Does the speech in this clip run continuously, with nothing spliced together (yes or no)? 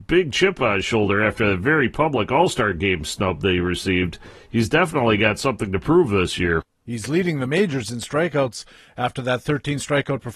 yes